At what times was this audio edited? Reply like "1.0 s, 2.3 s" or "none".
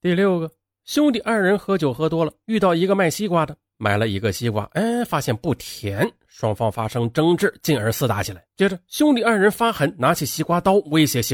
8.5 s